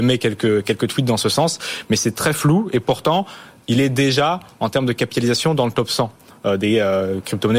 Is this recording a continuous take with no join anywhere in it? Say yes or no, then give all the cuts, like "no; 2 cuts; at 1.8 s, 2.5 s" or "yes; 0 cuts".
yes; 0 cuts